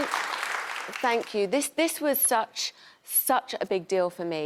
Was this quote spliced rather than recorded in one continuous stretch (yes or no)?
no